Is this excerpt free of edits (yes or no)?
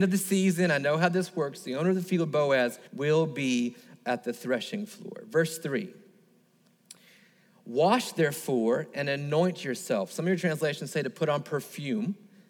no